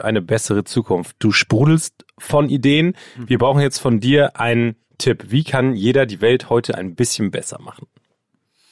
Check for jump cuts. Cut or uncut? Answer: uncut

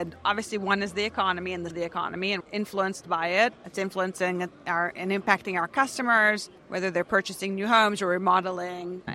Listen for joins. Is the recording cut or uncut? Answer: cut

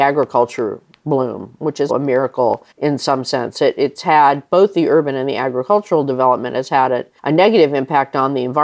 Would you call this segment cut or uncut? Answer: cut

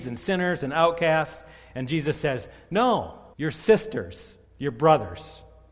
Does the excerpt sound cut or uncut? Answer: cut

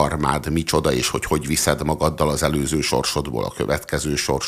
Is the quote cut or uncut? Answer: uncut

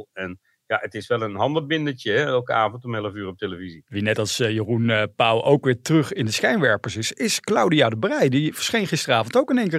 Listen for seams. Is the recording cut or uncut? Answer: uncut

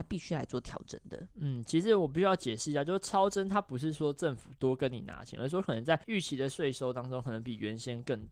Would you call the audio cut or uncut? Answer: cut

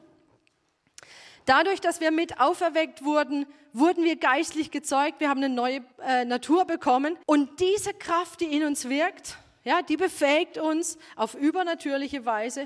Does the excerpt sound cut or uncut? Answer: cut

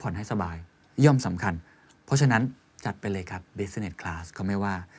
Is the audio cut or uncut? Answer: uncut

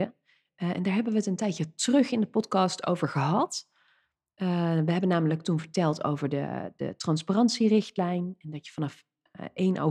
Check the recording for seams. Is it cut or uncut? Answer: uncut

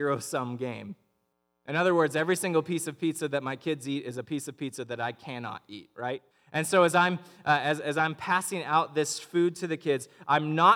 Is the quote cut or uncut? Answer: cut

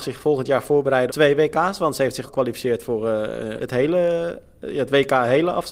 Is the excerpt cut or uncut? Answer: cut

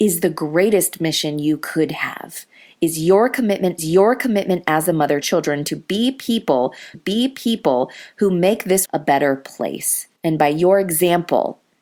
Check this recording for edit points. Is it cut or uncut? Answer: cut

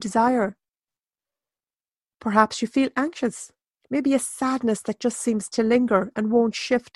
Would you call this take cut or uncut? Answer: cut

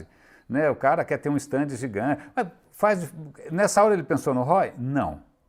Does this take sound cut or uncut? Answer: uncut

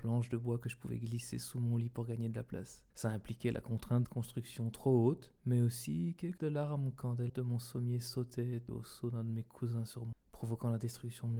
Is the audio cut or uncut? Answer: cut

